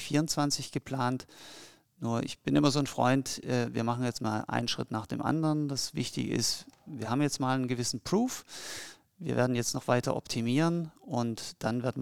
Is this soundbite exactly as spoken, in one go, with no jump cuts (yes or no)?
yes